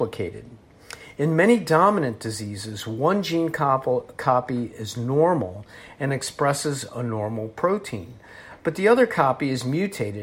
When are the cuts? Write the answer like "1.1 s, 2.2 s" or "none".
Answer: none